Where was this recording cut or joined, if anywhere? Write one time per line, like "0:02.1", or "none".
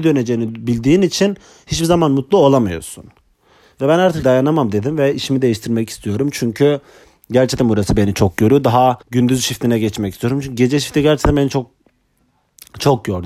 0:04.2
0:09.0